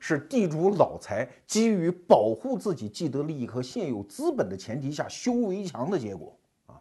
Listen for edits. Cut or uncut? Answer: uncut